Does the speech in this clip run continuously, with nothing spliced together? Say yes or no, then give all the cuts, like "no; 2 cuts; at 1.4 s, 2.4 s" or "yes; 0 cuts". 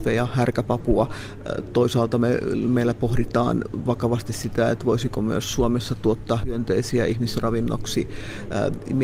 yes; 0 cuts